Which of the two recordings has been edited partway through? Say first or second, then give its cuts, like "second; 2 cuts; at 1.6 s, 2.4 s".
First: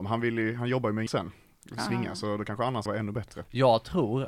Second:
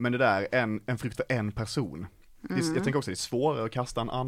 first; 2 cuts; at 1.1 s, 2.9 s